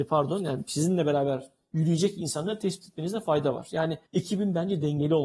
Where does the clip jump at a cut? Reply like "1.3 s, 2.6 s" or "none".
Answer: 4.1 s